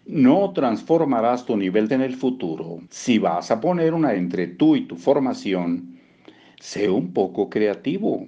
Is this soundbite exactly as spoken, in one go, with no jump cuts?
no; 3 cuts; at 1.9 s, 2.9 s, 4.1 s

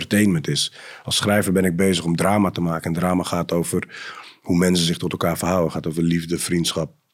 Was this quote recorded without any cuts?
yes; 0 cuts

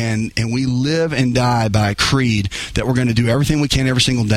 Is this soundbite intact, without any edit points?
yes; 0 cuts

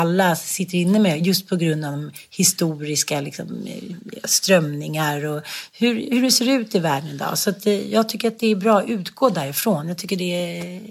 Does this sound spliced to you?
no; 0 cuts

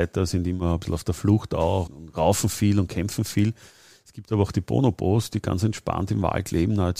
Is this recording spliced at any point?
yes; 1 cut; at 1.9 s

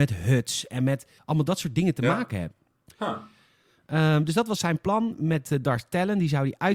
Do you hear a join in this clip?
yes; 2 cuts; at 1.2 s, 2.9 s

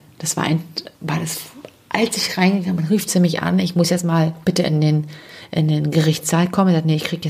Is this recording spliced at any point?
yes; 2 cuts; at 0.9 s, 4.4 s

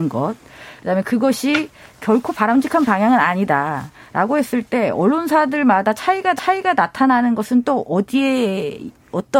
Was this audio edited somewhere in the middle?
yes; 1 cut; at 6.4 s

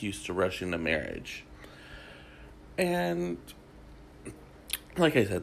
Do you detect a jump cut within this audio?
no; 0 cuts

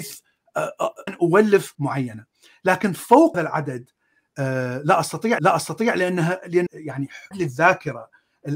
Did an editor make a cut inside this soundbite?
yes; 6 cuts; at 1.1 s, 1.7 s, 3.3 s, 5.4 s, 6.7 s, 7.3 s

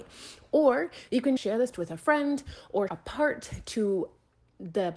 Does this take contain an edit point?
yes; 3 cuts; at 1.4 s, 1.7 s, 2.9 s

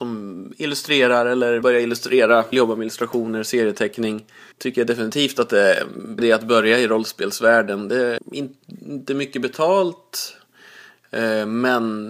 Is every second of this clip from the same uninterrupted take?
no; 5 cuts; at 1.6 s, 2.5 s, 4.5 s, 6.2 s, 8.2 s

